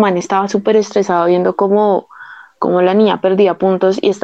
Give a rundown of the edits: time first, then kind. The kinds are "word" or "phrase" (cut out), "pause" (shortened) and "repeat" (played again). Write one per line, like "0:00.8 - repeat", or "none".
none